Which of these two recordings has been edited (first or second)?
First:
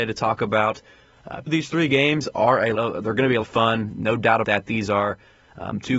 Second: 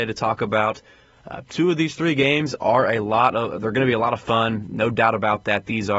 first